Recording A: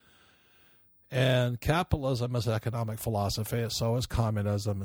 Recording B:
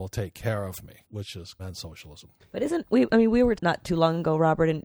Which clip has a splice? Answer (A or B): B